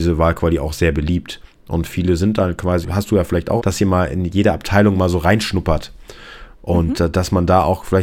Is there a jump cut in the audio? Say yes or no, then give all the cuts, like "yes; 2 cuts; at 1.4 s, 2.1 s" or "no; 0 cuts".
yes; 2 cuts; at 2.8 s, 3.6 s